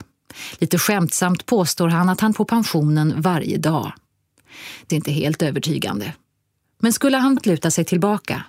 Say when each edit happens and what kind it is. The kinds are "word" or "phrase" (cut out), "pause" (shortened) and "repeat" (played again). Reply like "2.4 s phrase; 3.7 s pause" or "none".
2.3 s word; 4.9 s word; 7.4 s word